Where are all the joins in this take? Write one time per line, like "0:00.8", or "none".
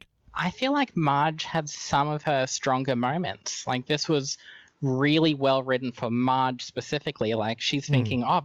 none